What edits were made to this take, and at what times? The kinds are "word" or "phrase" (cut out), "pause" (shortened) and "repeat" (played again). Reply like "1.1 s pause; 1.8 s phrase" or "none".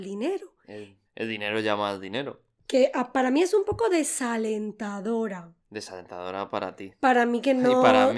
1.1 s pause; 5.6 s pause